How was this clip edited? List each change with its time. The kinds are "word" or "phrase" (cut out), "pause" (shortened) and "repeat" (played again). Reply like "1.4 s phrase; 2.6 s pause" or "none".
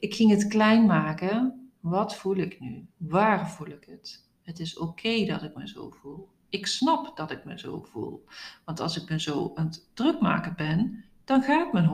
1.8 s pause; 2.9 s pause